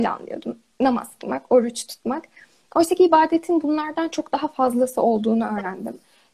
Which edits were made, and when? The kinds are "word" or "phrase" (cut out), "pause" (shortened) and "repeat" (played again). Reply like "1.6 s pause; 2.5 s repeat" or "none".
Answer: none